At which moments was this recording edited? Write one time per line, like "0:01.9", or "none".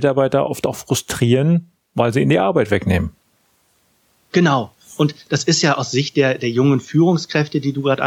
none